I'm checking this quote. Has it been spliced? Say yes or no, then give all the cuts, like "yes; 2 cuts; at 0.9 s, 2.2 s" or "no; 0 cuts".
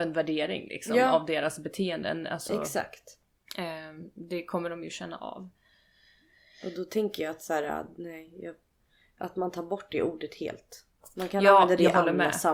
no; 0 cuts